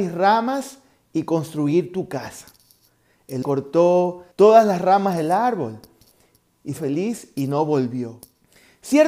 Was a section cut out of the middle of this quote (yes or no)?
yes